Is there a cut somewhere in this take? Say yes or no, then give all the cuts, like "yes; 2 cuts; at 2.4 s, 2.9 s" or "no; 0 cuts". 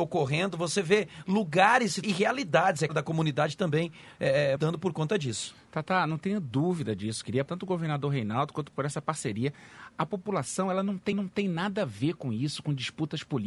yes; 6 cuts; at 2.0 s, 2.9 s, 4.6 s, 7.5 s, 8.7 s, 11.1 s